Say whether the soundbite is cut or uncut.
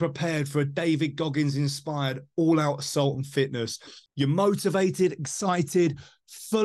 uncut